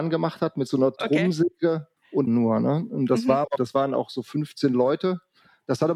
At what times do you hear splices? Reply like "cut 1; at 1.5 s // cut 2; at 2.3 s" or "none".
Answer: cut 1; at 2.0 s // cut 2; at 2.3 s // cut 3; at 3.6 s